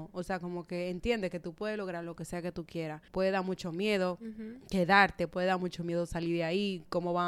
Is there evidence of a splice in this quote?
yes; 1 cut; at 3.1 s

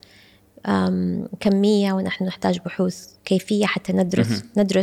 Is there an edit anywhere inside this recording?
yes; 1 cut; at 3.2 s

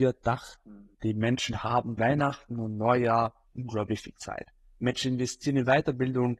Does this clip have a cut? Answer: yes; 1 cut; at 2.0 s

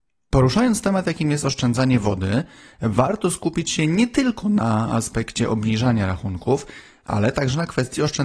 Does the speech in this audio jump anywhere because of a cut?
no; 0 cuts

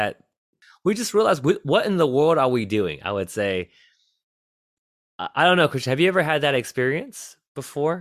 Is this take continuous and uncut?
yes; 0 cuts

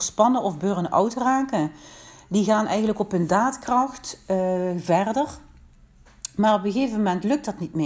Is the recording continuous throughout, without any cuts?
yes; 0 cuts

